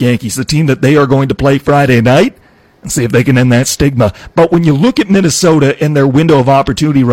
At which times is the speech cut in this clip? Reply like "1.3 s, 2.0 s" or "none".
none